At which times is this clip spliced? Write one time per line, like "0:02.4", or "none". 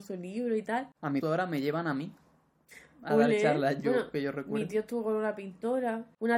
0:01.2
0:03.8